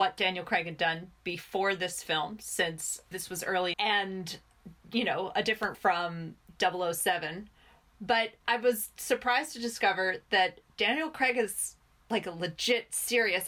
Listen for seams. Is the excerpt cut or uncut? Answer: cut